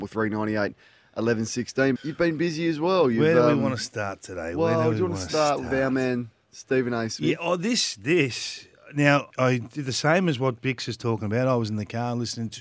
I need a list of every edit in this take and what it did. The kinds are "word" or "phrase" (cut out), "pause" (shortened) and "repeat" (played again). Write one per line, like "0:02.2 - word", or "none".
0:02.0 - word
0:09.3 - word

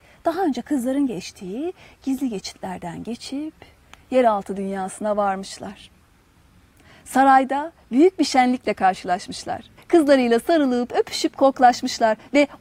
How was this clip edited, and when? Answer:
0:09.8 - pause

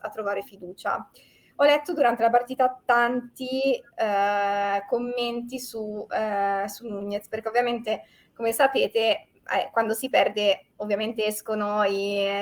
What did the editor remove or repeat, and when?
none

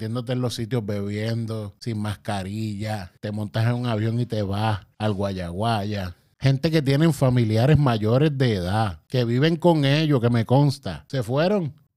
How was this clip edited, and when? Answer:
none

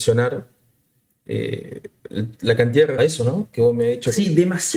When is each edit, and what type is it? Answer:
0:03.0 - phrase

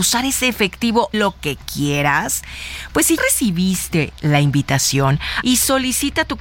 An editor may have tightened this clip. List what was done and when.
0:01.1 - word
0:03.2 - word
0:05.4 - word

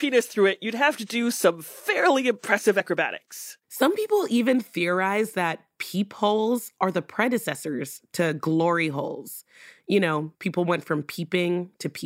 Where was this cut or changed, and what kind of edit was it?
0:03.6 - pause
0:10.3 - pause

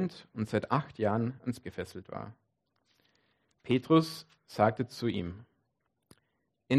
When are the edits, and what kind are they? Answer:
0:01.6 - word

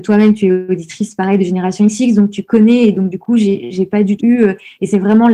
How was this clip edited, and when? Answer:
0:04.2 - word

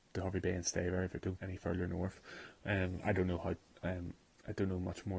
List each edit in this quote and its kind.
0:01.4 - word

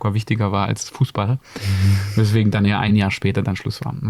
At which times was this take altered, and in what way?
none

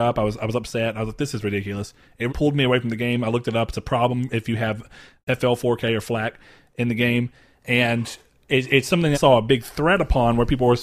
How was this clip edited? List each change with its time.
0:02.3 - word
0:09.1 - word

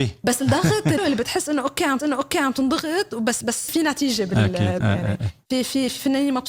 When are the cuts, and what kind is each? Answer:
0:01.0 - word
0:02.0 - repeat
0:03.7 - word
0:04.8 - word

